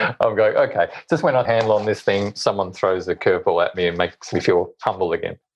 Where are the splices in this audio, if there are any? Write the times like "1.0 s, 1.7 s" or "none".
1.5 s